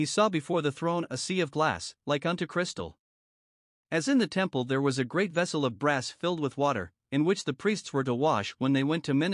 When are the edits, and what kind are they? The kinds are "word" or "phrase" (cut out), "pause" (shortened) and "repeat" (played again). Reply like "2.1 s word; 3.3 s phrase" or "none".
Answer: none